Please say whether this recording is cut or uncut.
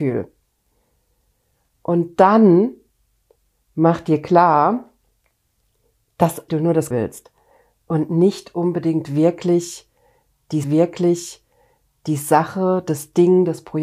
cut